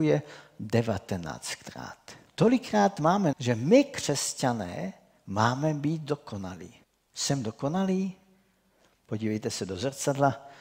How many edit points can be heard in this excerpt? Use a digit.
3